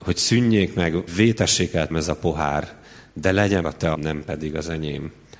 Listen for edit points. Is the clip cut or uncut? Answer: cut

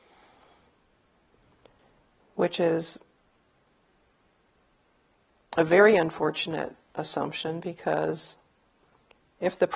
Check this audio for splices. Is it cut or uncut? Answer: uncut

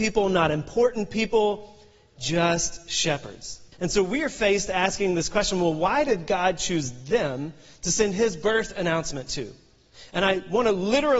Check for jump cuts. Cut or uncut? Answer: cut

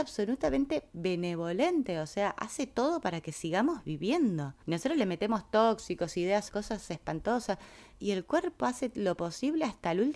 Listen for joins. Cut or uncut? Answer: cut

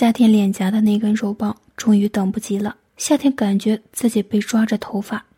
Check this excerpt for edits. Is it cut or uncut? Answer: cut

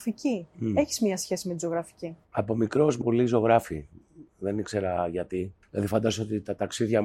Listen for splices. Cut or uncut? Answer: cut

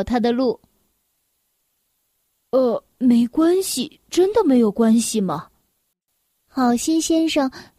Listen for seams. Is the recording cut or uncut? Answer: uncut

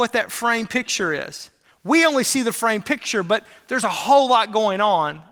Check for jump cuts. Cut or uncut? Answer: uncut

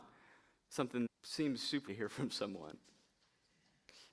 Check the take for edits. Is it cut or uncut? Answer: cut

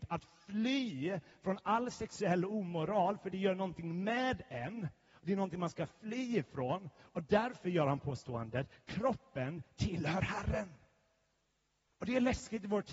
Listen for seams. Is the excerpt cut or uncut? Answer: uncut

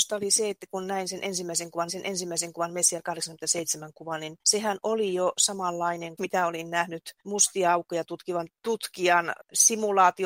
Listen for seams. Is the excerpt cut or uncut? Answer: cut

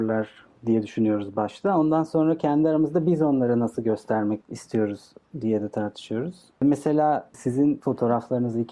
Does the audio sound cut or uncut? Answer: uncut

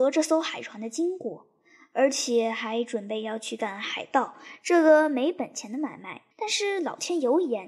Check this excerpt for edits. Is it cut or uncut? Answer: cut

